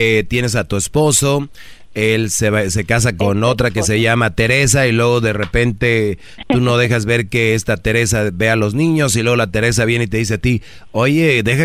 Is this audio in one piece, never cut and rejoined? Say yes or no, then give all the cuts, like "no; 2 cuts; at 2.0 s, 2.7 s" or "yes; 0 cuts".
yes; 0 cuts